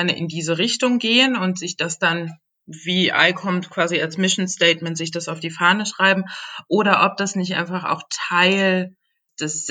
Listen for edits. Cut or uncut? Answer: uncut